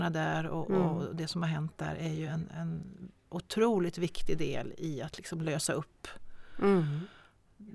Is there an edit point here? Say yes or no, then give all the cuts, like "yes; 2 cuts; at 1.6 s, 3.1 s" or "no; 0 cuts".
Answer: no; 0 cuts